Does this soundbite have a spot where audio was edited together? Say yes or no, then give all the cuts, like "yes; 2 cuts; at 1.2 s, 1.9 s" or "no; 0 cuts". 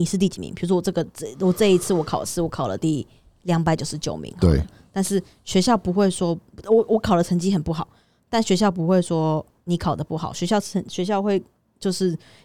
no; 0 cuts